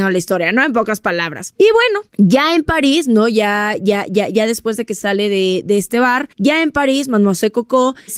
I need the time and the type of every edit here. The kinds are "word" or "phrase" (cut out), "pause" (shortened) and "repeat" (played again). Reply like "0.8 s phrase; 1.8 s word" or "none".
6.3 s pause